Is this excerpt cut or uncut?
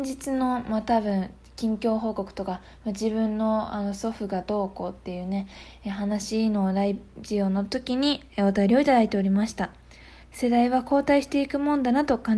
cut